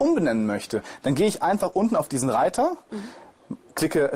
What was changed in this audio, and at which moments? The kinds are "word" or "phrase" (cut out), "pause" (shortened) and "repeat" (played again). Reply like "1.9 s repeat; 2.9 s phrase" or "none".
none